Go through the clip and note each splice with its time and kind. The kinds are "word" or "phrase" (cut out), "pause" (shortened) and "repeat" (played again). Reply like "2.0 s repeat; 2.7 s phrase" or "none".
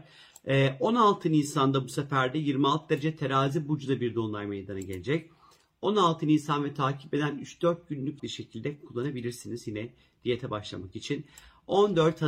8.2 s phrase